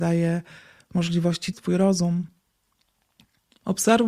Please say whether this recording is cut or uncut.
cut